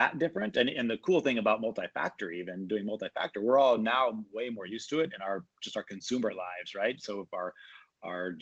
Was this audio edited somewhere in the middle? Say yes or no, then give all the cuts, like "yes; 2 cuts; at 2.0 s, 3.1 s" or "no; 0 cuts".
no; 0 cuts